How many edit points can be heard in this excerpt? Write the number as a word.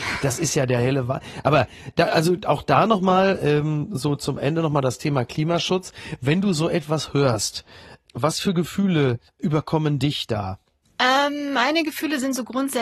one